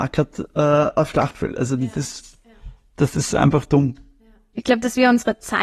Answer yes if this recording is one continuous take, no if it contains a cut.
yes